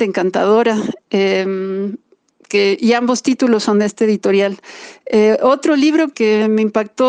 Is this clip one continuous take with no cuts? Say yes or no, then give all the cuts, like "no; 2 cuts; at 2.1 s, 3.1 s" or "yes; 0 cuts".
no; 1 cut; at 6.1 s